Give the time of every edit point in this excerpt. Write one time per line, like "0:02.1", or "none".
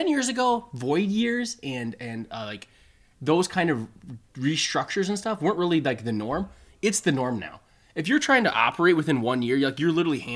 none